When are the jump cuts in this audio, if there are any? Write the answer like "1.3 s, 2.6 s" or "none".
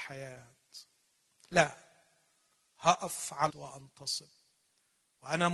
3.5 s